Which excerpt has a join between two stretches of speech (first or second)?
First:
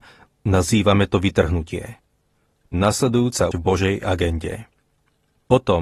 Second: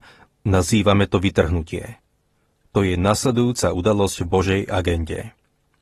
first